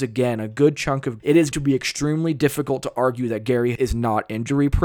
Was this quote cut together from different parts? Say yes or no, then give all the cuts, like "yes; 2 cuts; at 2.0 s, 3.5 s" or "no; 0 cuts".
yes; 3 cuts; at 1.2 s, 1.5 s, 3.8 s